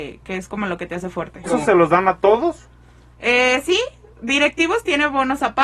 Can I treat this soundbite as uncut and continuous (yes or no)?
no